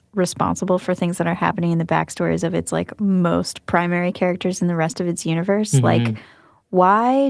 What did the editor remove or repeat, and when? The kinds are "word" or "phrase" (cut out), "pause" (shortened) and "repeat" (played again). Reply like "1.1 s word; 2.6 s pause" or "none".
none